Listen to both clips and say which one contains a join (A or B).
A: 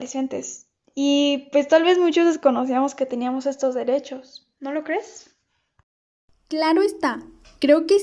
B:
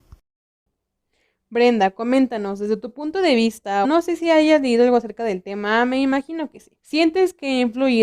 B